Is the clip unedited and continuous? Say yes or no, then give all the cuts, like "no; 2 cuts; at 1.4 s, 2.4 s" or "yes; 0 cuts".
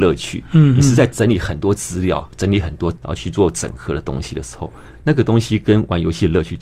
no; 1 cut; at 2.9 s